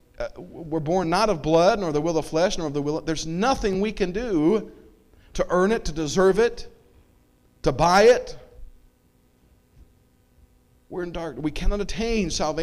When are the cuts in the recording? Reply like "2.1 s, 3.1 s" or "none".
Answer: none